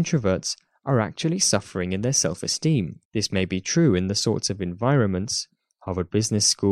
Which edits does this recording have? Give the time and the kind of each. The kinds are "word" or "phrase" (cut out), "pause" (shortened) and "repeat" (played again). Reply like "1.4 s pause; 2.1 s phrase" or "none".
3.0 s pause